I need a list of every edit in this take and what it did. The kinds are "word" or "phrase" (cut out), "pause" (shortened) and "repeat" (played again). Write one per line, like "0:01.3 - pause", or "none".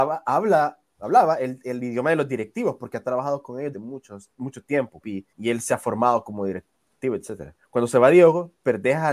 0:03.7 - word
0:05.0 - phrase
0:05.3 - pause
0:07.6 - pause